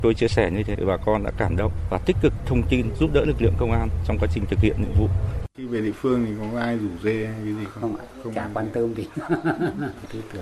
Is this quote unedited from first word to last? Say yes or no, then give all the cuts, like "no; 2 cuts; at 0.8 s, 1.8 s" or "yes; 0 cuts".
no; 1 cut; at 5.5 s